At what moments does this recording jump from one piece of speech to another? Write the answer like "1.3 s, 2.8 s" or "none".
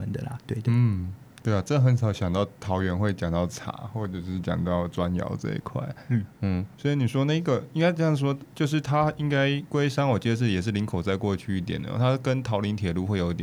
6.7 s